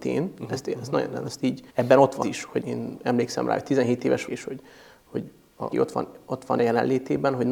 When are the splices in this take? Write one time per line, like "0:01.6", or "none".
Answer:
0:01.7
0:02.2
0:02.6
0:04.3
0:05.7
0:06.6